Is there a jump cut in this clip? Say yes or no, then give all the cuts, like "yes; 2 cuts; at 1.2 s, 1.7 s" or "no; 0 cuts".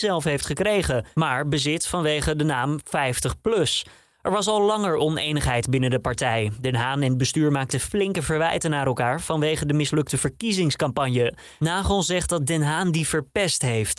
no; 0 cuts